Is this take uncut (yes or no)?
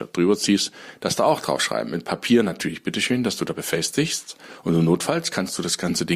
yes